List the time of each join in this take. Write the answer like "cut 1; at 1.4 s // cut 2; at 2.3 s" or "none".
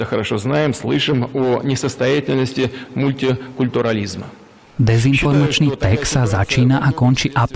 none